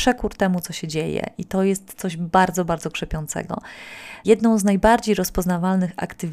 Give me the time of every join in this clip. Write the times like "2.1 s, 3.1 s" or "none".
none